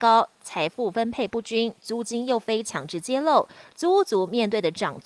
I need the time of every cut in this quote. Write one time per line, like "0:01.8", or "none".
none